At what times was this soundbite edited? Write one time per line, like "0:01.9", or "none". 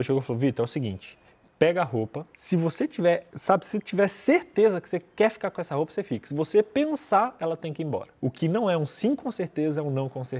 0:02.3
0:08.2